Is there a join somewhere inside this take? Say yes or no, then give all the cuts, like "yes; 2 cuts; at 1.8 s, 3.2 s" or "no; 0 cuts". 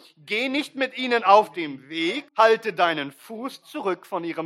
yes; 1 cut; at 2.3 s